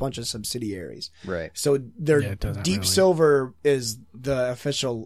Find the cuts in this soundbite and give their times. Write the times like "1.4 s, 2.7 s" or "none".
3.6 s